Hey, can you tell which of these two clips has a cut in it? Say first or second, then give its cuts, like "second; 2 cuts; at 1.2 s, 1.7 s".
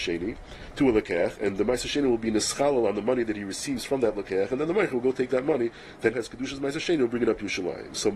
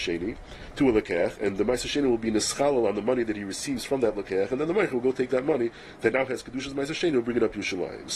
first; 1 cut; at 6.1 s